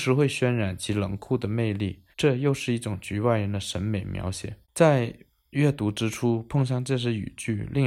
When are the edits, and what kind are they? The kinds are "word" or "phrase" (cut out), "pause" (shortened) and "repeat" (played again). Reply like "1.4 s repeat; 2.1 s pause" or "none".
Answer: 2.1 s pause; 4.6 s pause